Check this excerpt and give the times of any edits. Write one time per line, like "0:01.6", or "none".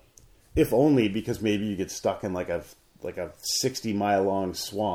none